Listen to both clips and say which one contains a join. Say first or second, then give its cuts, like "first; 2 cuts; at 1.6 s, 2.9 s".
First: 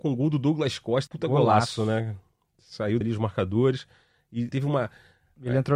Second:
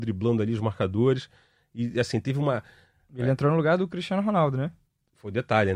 first; 3 cuts; at 1.1 s, 3.0 s, 4.5 s